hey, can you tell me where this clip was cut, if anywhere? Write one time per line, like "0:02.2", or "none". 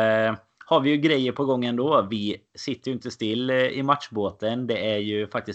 none